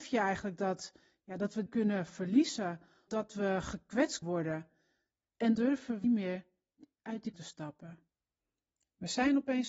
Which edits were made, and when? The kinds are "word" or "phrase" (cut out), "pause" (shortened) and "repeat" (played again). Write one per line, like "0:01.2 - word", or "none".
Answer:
0:01.7 - word
0:03.1 - word
0:04.2 - word
0:05.6 - word
0:06.0 - word
0:07.3 - word